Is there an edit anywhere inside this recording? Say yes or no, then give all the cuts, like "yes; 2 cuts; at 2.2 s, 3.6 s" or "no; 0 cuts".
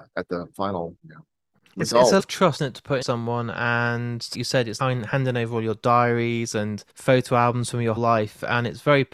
yes; 8 cuts; at 1.0 s, 2.2 s, 2.6 s, 3.0 s, 4.3 s, 4.8 s, 6.9 s, 8.0 s